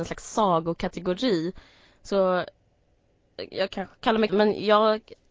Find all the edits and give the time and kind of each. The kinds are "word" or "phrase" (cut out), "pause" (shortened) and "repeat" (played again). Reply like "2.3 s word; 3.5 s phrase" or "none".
4.3 s word